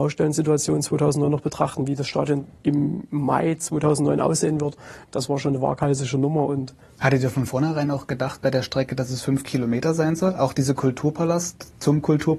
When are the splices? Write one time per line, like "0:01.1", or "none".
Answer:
0:02.6
0:06.8

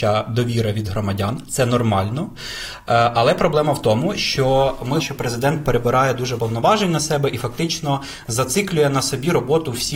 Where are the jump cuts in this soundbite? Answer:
0:05.0
0:06.4

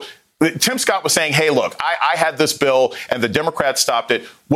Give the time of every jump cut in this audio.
none

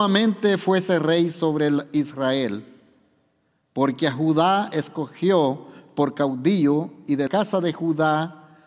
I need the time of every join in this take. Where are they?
0:07.3

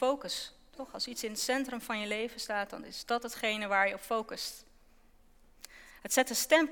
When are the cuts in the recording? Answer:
none

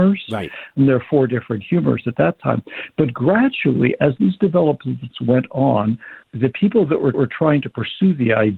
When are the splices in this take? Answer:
0:06.2
0:07.1

